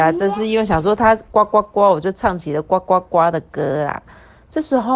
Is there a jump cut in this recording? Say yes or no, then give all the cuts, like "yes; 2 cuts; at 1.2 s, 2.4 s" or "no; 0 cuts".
no; 0 cuts